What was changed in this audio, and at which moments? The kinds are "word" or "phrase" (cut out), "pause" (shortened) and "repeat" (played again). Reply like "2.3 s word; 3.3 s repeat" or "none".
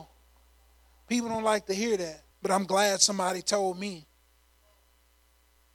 2.3 s pause